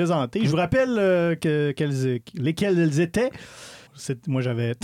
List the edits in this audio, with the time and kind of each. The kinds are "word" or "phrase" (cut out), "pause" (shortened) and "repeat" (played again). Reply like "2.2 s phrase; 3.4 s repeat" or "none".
3.9 s pause

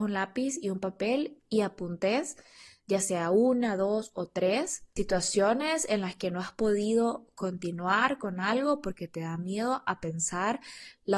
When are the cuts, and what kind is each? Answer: none

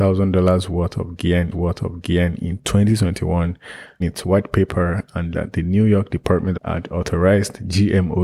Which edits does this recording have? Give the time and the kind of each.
1.5 s repeat; 4.0 s phrase; 5.3 s word; 6.5 s phrase

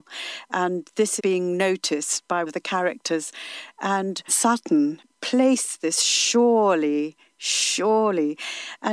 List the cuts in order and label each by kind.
1.2 s word; 2.5 s word; 4.3 s word; 5.1 s pause

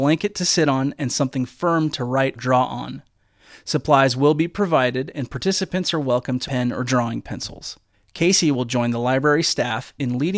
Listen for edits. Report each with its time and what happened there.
2.4 s word; 6.5 s phrase; 7.9 s pause

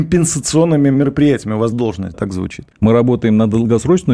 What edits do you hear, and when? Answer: 1.7 s word; 2.1 s word; 2.7 s pause

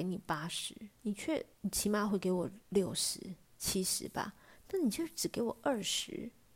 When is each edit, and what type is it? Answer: 0.9 s pause; 1.5 s pause; 2.6 s pause; 3.4 s pause

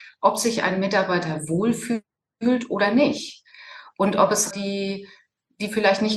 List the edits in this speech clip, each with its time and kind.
4.5 s phrase

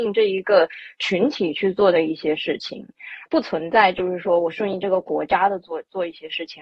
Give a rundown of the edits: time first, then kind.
3.3 s word

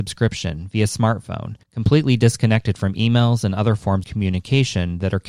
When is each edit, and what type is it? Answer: 1.6 s pause; 4.0 s word

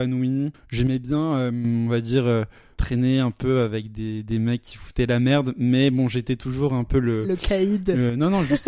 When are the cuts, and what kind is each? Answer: none

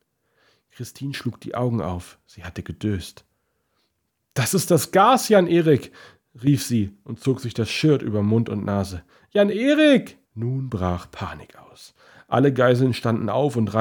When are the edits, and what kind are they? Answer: 10.2 s pause

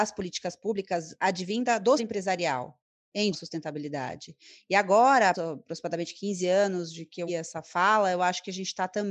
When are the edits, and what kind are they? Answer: 2.0 s word; 3.3 s word; 5.3 s word; 7.3 s word

